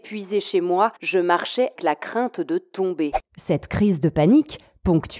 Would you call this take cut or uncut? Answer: cut